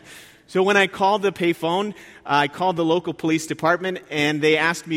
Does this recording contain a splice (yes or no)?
no